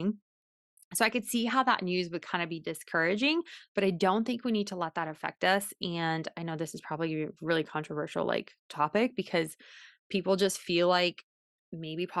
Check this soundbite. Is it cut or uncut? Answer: uncut